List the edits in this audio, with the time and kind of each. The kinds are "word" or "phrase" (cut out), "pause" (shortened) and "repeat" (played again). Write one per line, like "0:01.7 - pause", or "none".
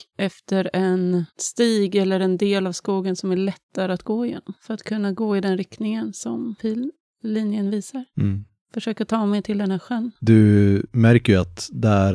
0:01.3 - pause